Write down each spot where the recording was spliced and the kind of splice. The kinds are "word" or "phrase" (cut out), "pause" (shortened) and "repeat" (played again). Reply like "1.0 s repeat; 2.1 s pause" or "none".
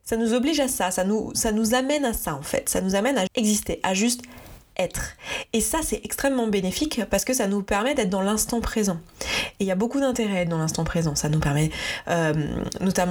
3.3 s word